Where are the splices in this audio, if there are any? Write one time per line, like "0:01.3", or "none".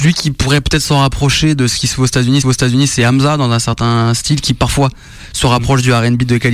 0:02.4